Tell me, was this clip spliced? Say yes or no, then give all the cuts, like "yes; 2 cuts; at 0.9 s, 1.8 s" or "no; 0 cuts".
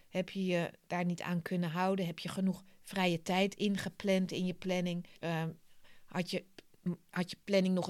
yes; 1 cut; at 5.2 s